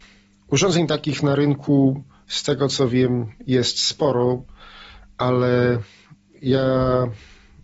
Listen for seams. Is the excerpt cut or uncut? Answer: uncut